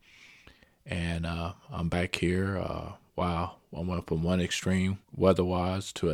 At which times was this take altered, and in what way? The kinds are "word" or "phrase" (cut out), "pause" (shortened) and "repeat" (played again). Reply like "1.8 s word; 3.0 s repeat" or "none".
5.0 s pause